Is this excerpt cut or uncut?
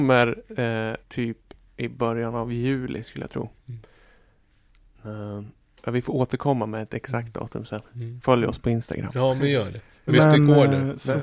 cut